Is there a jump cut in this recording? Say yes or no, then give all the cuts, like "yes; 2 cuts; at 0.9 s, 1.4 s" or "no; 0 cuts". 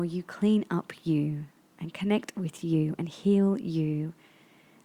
no; 0 cuts